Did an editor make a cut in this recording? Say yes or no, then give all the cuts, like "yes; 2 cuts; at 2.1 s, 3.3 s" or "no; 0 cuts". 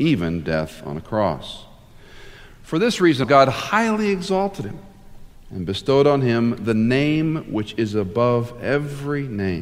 yes; 1 cut; at 3.2 s